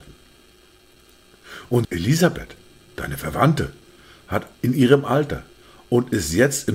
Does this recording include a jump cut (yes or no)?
yes